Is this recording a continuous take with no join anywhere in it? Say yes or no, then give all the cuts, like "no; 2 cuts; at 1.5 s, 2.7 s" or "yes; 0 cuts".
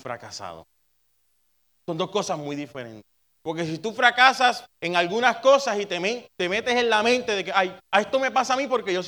no; 3 cuts; at 3.2 s, 4.7 s, 7.8 s